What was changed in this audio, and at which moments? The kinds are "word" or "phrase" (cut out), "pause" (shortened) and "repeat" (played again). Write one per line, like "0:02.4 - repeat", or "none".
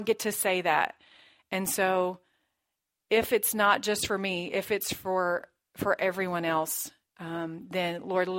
none